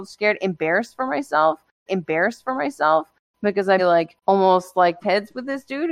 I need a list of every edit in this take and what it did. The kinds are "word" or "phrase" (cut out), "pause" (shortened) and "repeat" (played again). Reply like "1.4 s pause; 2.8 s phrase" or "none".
1.9 s repeat; 3.8 s word; 4.2 s pause; 5.0 s word